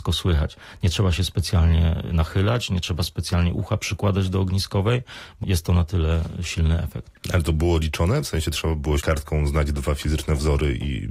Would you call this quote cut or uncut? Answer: cut